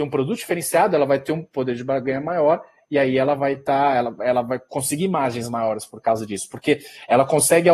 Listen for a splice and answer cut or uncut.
uncut